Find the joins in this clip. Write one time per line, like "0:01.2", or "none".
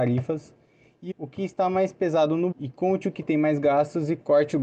0:01.1
0:02.5